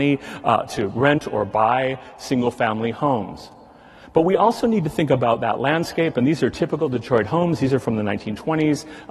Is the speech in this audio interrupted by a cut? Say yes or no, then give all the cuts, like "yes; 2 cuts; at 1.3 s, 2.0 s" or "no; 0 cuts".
no; 0 cuts